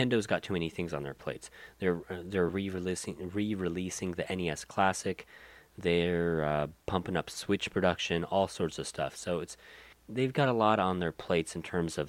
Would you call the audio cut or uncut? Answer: uncut